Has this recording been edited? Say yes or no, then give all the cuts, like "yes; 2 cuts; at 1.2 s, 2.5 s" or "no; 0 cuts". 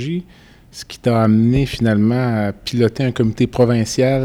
no; 0 cuts